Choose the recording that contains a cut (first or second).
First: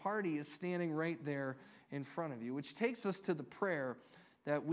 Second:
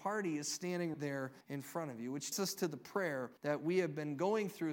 second